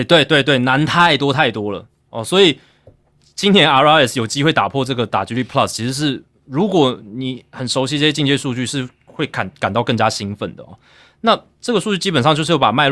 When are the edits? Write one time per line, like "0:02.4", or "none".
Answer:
none